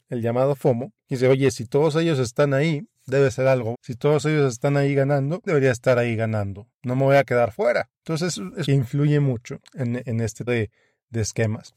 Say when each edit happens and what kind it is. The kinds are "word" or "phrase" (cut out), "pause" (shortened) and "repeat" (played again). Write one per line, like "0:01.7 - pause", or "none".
0:03.7 - word
0:05.5 - phrase
0:08.7 - phrase
0:09.7 - pause
0:10.5 - word